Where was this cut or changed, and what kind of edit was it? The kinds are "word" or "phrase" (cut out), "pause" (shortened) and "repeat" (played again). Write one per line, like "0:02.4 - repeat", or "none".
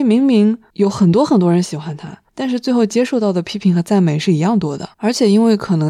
0:02.3 - pause
0:04.9 - pause